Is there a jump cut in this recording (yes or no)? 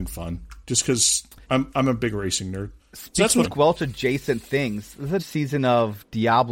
yes